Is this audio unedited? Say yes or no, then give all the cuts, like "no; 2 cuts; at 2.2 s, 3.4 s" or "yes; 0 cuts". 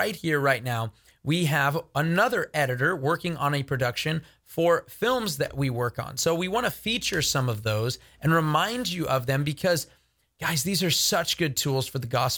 yes; 0 cuts